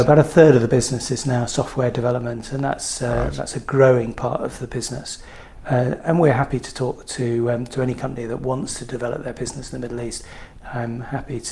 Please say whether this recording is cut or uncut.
uncut